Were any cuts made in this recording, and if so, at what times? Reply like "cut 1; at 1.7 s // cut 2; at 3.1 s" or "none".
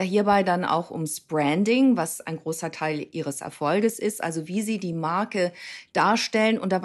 none